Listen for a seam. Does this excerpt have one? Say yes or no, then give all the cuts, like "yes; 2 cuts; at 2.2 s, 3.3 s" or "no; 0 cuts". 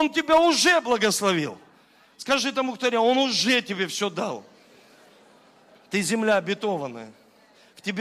no; 0 cuts